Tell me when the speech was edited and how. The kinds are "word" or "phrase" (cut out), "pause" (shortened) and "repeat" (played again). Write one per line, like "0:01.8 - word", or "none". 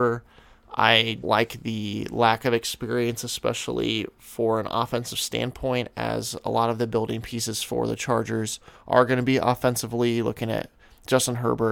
0:01.2 - word